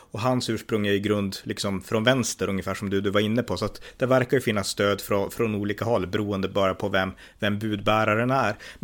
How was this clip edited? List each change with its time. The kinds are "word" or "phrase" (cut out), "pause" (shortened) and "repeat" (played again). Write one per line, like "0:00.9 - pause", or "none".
none

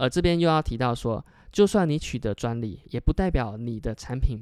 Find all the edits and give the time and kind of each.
none

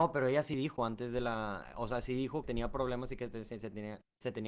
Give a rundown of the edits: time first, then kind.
0:02.4 - word

